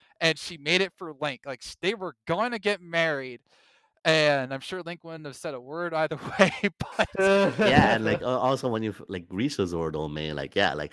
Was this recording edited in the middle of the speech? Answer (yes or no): no